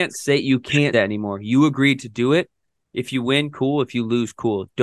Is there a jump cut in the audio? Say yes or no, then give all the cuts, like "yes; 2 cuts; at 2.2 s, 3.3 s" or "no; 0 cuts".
yes; 1 cut; at 0.9 s